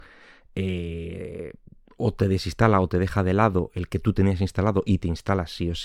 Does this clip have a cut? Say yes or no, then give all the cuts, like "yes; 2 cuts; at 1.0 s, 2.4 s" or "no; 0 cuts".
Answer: no; 0 cuts